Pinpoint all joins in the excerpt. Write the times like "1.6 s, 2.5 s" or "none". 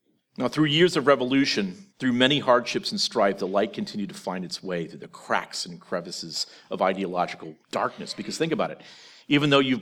1.9 s, 7.6 s

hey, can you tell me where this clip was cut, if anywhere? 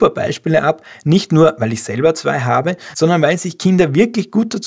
none

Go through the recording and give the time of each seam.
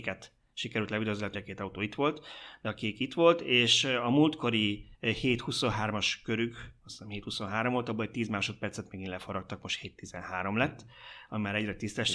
1.3 s, 4.9 s, 6.8 s

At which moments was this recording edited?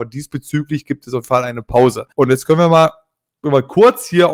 1.2 s, 2.1 s

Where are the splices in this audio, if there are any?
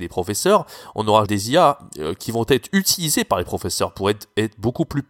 1.3 s

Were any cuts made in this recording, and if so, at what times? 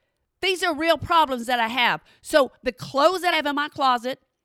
3.3 s

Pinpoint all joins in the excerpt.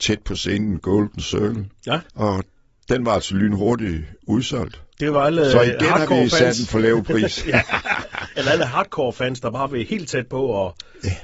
2.1 s

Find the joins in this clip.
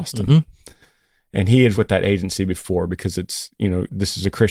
1.7 s

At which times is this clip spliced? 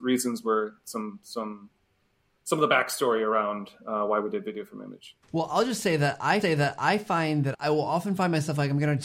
5.2 s, 6.4 s, 7.5 s

